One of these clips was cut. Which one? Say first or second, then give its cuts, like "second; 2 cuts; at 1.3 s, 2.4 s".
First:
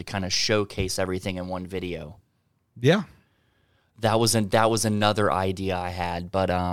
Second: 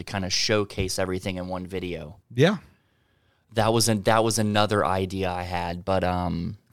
second; 1 cut; at 2.2 s